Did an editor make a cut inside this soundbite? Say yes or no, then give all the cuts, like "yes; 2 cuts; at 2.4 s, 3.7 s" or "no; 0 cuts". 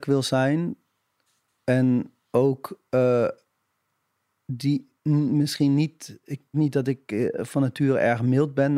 yes; 2 cuts; at 5.0 s, 6.5 s